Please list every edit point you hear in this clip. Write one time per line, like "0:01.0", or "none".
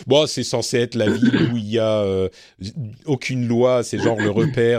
none